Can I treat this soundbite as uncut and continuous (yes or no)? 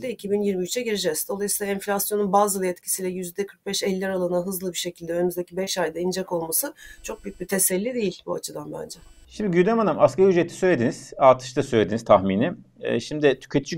yes